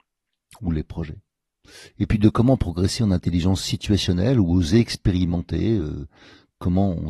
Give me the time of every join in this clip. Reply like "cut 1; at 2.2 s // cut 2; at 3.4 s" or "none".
none